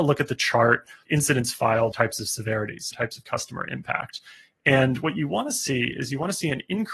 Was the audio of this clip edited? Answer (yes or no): yes